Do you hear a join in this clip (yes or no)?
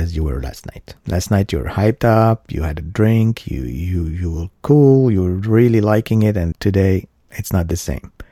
yes